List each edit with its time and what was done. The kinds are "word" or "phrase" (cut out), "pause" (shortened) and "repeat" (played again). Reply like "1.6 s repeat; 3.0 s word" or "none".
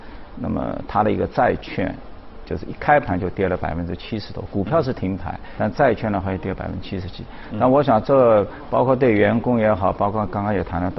5.6 s word